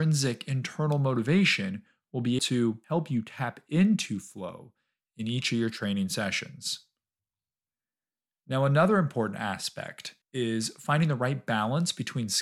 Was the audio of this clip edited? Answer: yes; 3 cuts; at 2.4 s, 2.8 s, 10.2 s

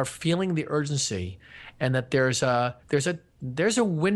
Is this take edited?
yes; 1 cut; at 2.8 s

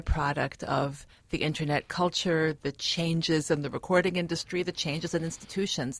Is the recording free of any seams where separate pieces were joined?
yes; 0 cuts

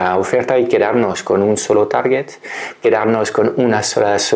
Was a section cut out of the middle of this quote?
no; 0 cuts

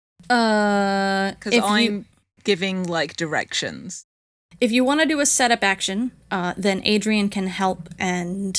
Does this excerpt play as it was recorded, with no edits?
yes; 0 cuts

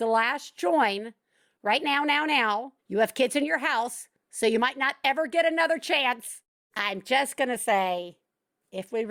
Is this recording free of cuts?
no; 1 cut; at 2.8 s

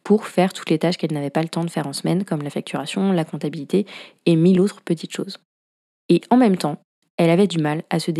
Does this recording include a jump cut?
no; 0 cuts

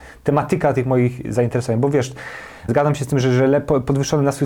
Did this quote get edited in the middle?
yes; 2 cuts; at 2.7 s, 3.2 s

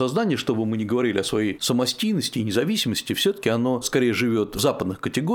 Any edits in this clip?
no; 0 cuts

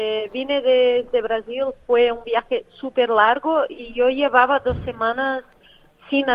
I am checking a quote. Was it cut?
no; 0 cuts

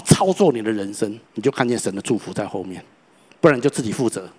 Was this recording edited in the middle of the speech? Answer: yes; 1 cut; at 1.2 s

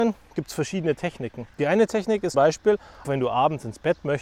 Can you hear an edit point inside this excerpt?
yes; 3 cuts; at 1.5 s, 2.3 s, 3.0 s

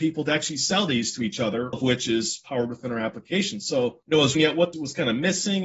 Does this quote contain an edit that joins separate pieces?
yes; 4 cuts; at 1.7 s, 4.0 s, 4.4 s, 4.7 s

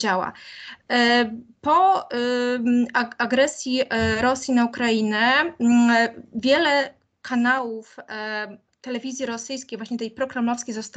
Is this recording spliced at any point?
no; 0 cuts

